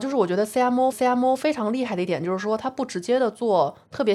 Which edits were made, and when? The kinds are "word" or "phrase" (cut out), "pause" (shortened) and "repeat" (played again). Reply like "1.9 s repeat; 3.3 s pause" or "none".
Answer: 0.9 s repeat